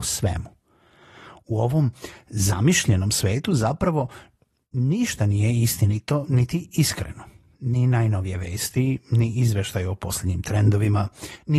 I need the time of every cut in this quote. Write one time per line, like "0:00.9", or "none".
none